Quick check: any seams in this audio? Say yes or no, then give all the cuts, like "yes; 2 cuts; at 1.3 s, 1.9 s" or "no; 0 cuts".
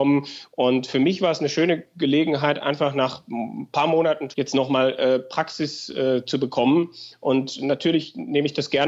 yes; 1 cut; at 4.3 s